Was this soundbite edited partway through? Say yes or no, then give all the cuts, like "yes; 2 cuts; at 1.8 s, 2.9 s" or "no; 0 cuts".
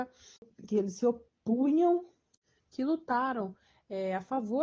no; 0 cuts